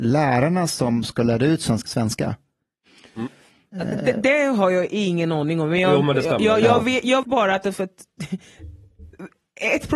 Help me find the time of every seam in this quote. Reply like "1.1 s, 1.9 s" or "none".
1.9 s, 7.2 s